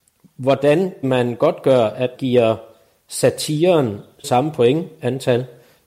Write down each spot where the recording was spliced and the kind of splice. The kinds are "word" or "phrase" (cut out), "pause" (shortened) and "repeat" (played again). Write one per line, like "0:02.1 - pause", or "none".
0:01.0 - word
0:02.1 - word
0:04.2 - word